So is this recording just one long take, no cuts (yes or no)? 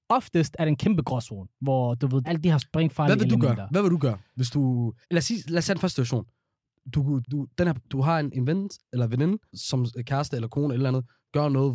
no